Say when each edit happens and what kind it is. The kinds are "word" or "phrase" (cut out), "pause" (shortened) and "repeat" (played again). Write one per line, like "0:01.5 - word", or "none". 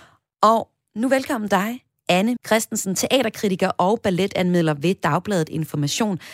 0:01.5 - word
0:02.4 - word